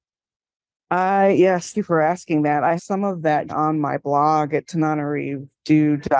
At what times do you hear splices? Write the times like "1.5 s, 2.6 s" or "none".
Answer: 1.7 s, 2.8 s, 3.5 s